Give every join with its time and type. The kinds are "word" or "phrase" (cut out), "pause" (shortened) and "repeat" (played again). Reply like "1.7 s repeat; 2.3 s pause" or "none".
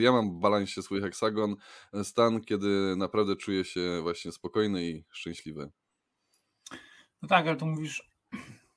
none